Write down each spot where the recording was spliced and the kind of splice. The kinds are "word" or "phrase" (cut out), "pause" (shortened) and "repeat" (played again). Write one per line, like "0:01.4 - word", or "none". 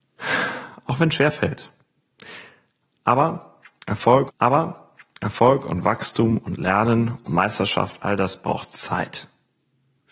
0:04.3 - repeat